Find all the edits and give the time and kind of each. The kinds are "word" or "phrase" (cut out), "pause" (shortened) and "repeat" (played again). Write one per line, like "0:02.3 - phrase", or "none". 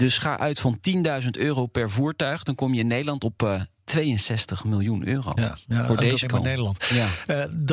0:06.2 - word